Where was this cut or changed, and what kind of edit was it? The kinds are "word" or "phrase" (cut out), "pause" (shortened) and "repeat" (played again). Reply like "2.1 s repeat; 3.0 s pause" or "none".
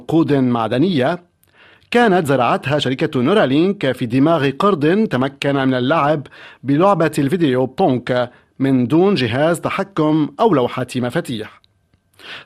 none